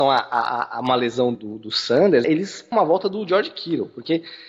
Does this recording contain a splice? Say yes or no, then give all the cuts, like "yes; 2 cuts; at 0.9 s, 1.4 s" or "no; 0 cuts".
yes; 3 cuts; at 1.4 s, 2.2 s, 2.7 s